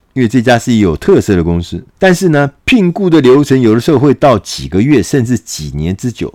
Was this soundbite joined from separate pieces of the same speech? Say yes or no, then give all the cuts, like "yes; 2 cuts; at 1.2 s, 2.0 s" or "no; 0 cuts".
yes; 1 cut; at 1.9 s